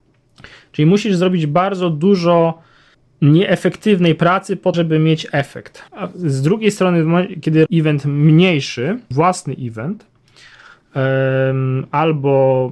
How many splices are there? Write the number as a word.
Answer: five